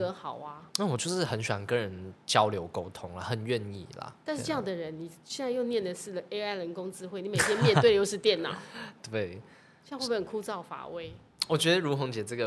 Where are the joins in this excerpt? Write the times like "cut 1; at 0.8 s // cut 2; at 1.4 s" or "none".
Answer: none

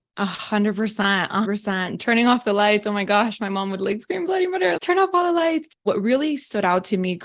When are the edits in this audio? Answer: cut 1; at 1.4 s // cut 2; at 4.8 s

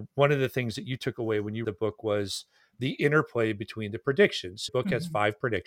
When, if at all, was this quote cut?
cut 1; at 1.6 s // cut 2; at 4.7 s

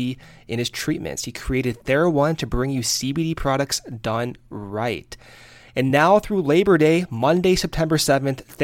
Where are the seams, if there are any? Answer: none

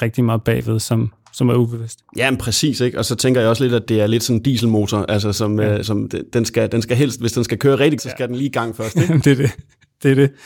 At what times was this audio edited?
cut 1; at 3.9 s // cut 2; at 5.8 s // cut 3; at 8.0 s

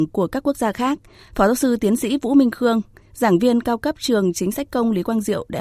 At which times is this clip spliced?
none

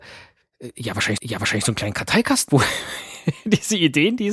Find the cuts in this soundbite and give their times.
cut 1; at 1.2 s // cut 2; at 2.5 s

